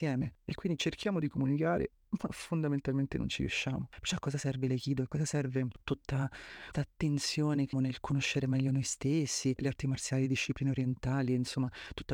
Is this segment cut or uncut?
cut